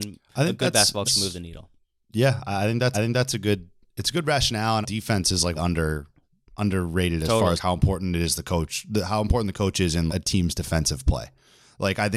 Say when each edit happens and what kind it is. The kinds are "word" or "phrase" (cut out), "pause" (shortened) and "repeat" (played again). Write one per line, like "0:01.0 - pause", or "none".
0:01.0 - word
0:01.8 - pause
0:02.9 - repeat
0:04.8 - phrase
0:05.6 - word
0:07.6 - word
0:10.1 - word